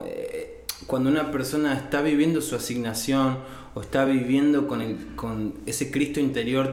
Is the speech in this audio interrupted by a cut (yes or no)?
no